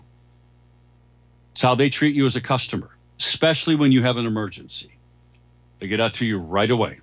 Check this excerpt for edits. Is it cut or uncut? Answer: uncut